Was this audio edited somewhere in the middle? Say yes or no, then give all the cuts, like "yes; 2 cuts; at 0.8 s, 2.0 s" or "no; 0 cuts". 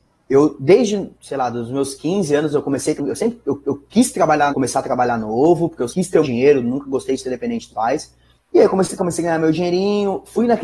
yes; 9 cuts; at 1.1 s, 3.0 s, 3.6 s, 4.5 s, 5.9 s, 6.2 s, 7.7 s, 8.4 s, 9.0 s